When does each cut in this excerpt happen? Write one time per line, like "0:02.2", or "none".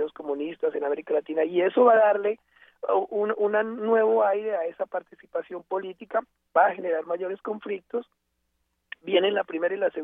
none